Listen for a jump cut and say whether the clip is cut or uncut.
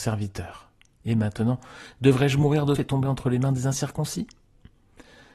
cut